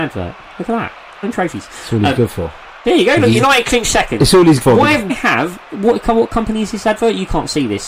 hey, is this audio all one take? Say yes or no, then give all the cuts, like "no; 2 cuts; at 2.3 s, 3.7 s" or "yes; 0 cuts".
no; 4 cuts; at 1.2 s, 2.8 s, 4.6 s, 5.1 s